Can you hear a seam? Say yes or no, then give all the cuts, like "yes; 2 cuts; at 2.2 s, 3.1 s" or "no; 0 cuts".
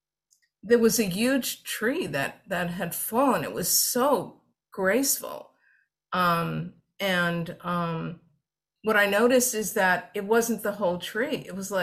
no; 0 cuts